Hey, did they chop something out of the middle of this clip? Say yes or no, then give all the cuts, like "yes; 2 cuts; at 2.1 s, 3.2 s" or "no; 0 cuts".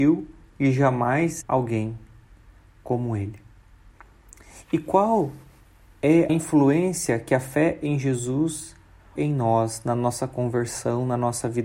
yes; 3 cuts; at 1.4 s, 6.3 s, 9.2 s